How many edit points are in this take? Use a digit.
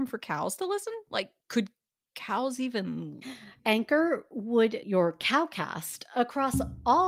4